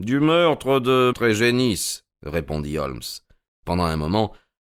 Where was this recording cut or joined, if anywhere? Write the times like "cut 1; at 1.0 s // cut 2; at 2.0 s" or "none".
cut 1; at 1.1 s